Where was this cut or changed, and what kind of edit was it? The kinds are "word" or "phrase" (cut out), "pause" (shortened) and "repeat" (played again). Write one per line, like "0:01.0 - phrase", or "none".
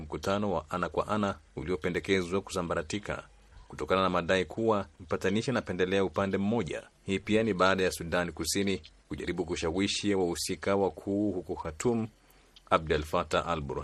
0:01.5 - pause
0:04.9 - pause
0:06.9 - pause
0:09.0 - pause